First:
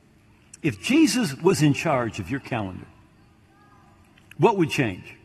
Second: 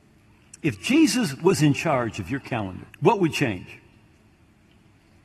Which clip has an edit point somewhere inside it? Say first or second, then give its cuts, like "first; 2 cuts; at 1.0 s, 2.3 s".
second; 1 cut; at 2.9 s